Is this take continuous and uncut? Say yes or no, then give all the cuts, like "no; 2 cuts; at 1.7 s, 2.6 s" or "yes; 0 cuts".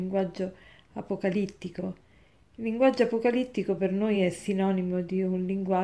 yes; 0 cuts